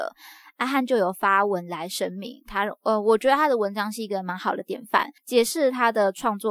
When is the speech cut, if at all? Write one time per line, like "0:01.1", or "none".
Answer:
0:05.2